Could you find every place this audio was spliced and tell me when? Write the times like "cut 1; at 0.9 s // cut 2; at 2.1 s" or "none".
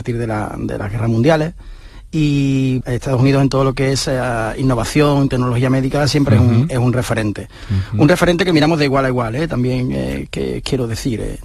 cut 1; at 2.8 s